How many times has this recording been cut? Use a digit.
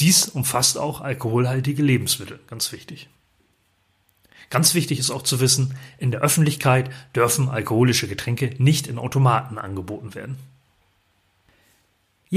0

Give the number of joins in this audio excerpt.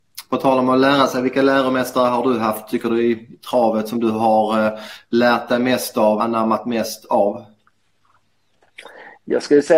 1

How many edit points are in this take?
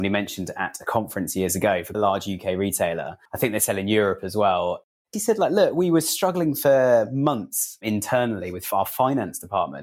3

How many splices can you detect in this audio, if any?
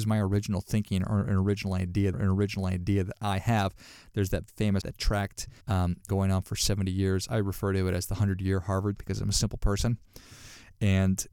6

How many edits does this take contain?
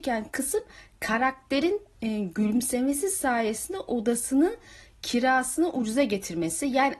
0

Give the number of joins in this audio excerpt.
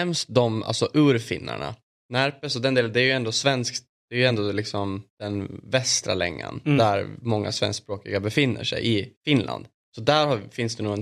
0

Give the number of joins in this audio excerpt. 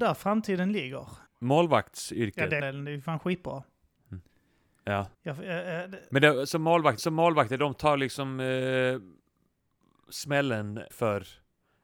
5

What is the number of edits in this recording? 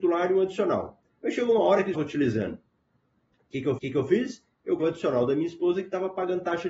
3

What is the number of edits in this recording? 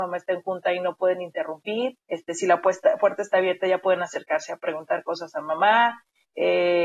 1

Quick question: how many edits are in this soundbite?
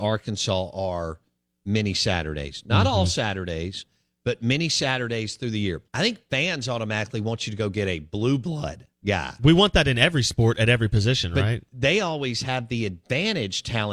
2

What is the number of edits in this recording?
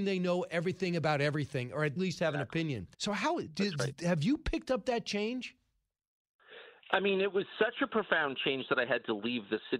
2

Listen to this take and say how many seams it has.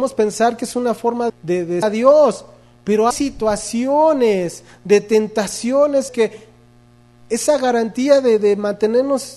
4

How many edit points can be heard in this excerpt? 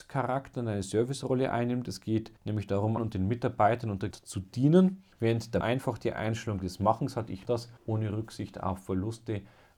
7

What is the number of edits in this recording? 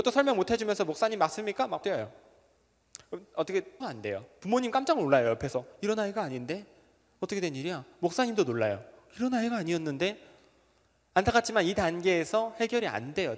2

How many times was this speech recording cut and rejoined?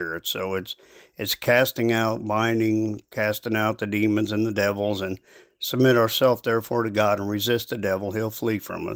0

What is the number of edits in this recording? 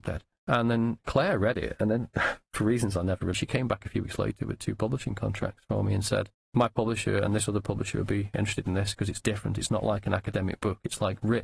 1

